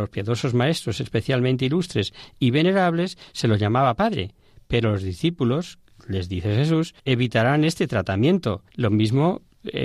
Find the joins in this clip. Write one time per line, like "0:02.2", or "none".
0:07.0
0:08.7